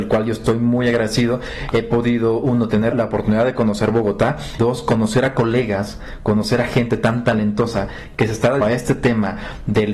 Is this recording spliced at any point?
yes; 3 cuts; at 2.9 s, 4.6 s, 8.6 s

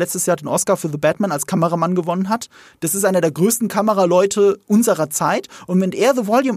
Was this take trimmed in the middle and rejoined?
no; 0 cuts

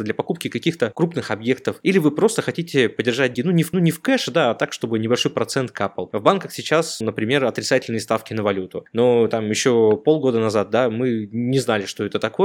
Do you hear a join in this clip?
yes; 3 cuts; at 3.3 s, 3.7 s, 7.0 s

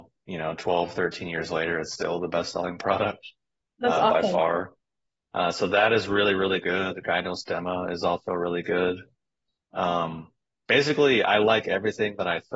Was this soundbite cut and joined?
no; 0 cuts

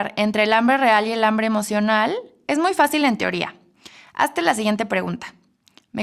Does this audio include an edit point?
no; 0 cuts

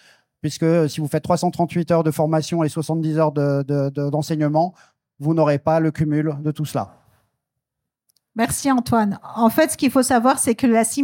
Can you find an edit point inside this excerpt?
no; 0 cuts

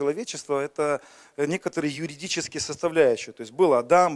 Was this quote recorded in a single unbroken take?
yes; 0 cuts

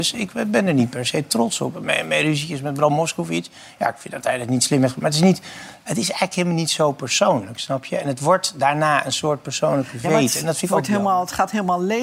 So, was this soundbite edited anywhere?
no; 0 cuts

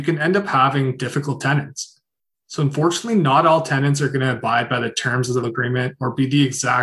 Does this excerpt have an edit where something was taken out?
yes; 1 cut; at 5.4 s

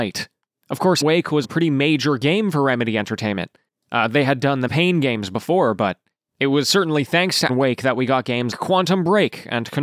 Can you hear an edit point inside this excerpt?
yes; 5 cuts; at 1.0 s, 1.4 s, 4.7 s, 7.5 s, 8.5 s

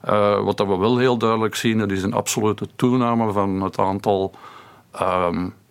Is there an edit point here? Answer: no; 0 cuts

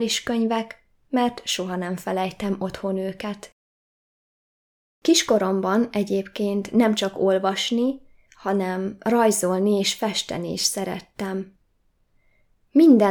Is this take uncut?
yes; 0 cuts

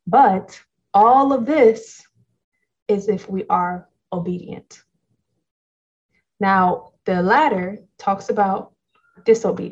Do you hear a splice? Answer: no; 0 cuts

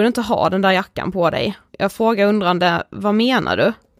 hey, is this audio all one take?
no; 1 cut; at 1.7 s

